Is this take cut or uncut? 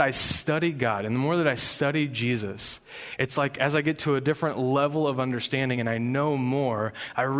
uncut